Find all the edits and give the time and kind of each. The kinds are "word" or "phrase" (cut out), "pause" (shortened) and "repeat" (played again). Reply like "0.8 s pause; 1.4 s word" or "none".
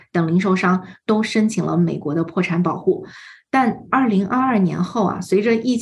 none